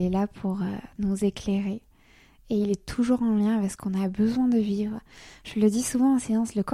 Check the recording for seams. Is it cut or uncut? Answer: uncut